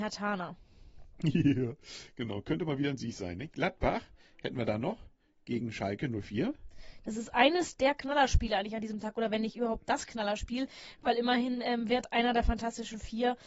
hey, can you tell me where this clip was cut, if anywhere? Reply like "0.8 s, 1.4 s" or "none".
none